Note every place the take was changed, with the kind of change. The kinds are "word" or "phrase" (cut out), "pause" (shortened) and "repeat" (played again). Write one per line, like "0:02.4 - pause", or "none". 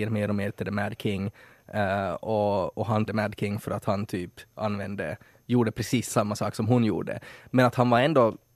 0:03.1 - phrase

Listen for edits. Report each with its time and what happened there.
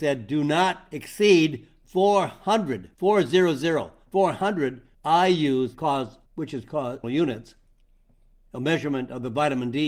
0:02.9 - pause
0:04.9 - pause
0:05.7 - word
0:06.3 - pause
0:07.0 - phrase

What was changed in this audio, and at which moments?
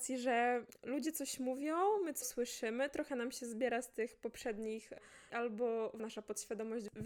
0:02.2 - word
0:05.3 - word
0:06.0 - word

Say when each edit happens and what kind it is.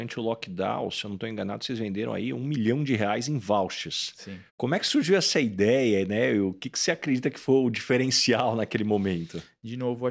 0:04.5 - pause

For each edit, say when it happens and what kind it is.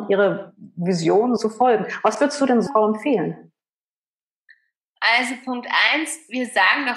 0:01.4 - word
0:02.7 - word

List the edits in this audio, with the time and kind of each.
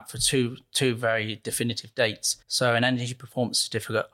0:02.4 - pause

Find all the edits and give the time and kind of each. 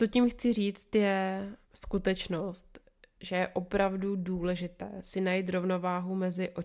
0:01.6 - pause

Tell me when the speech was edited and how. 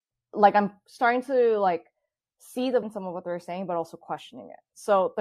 0:02.8 - word

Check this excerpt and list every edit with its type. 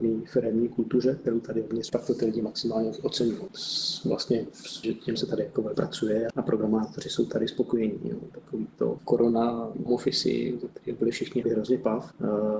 0:01.9 - word
0:04.8 - word
0:05.2 - word
0:05.7 - word
0:06.3 - word
0:09.9 - word
0:11.4 - word

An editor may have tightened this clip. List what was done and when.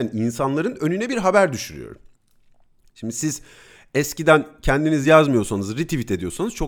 none

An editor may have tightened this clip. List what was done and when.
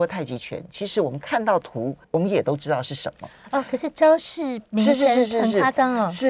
0:02.0 - pause

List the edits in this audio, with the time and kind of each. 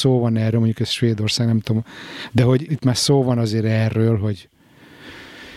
0:02.7 - word

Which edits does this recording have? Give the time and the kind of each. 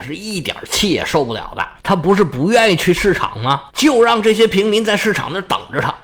0:01.8 - pause
0:03.7 - pause

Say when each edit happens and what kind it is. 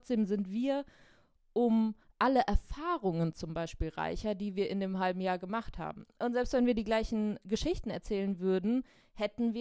none

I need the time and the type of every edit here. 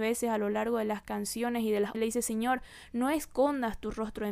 0:01.9 - word

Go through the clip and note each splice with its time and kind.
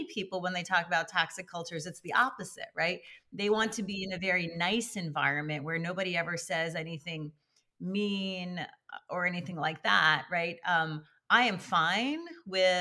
none

